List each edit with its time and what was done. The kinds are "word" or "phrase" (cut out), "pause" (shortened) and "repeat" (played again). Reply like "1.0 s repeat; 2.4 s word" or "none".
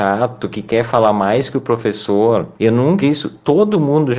2.5 s pause; 3.0 s word